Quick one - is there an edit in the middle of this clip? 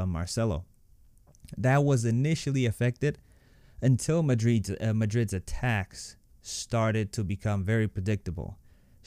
no; 0 cuts

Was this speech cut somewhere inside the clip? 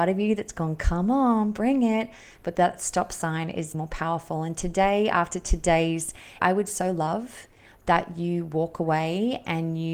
yes; 2 cuts; at 3.7 s, 6.4 s

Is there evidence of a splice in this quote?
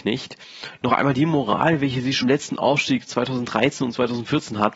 yes; 1 cut; at 2.2 s

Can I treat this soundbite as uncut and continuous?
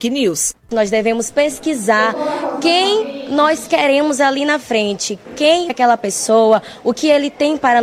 no; 1 cut; at 5.7 s

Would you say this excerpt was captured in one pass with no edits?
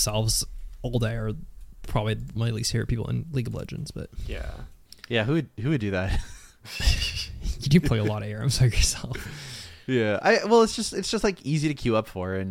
yes; 0 cuts

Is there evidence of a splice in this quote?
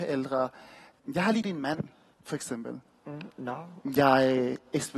yes; 1 cut; at 1.4 s

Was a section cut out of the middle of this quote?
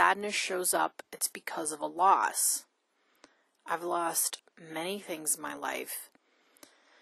no; 0 cuts

